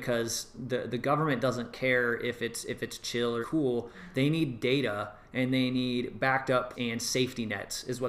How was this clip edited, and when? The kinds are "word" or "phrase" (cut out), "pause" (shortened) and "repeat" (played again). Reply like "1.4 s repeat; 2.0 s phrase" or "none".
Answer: 3.4 s word; 6.7 s word